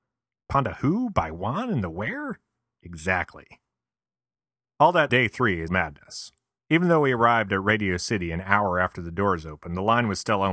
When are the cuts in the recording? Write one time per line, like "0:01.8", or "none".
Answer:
0:05.1
0:05.7

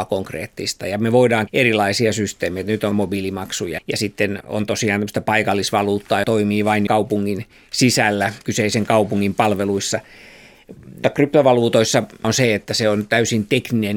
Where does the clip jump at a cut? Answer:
0:01.5
0:02.9
0:03.8
0:04.4
0:06.2
0:06.9
0:08.4
0:11.0
0:12.2

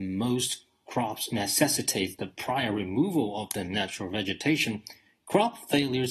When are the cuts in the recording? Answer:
none

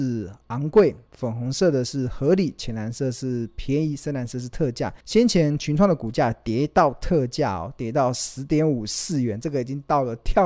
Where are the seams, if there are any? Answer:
0:01.1
0:05.0

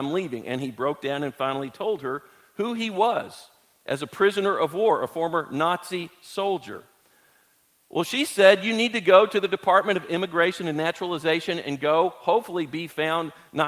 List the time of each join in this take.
none

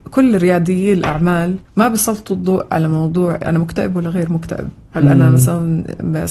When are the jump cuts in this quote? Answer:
0:01.6
0:03.4

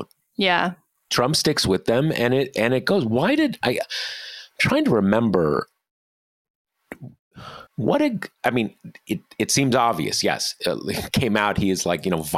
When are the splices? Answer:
0:07.7
0:08.3

